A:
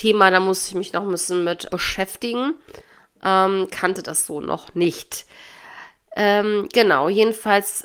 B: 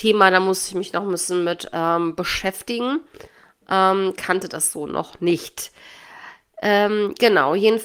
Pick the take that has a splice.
A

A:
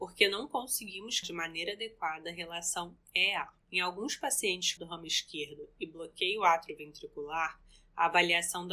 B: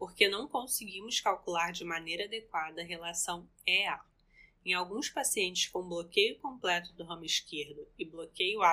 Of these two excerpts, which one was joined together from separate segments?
A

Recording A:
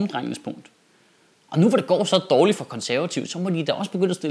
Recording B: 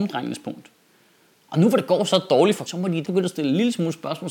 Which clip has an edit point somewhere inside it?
B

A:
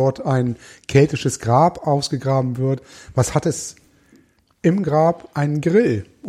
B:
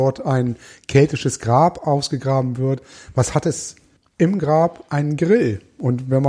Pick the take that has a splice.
B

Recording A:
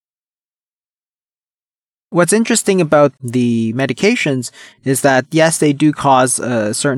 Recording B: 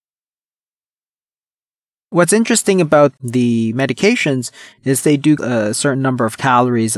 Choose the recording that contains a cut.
B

